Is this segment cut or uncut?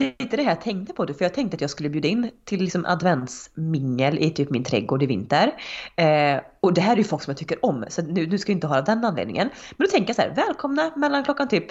uncut